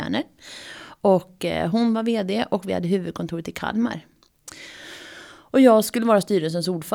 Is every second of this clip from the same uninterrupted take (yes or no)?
yes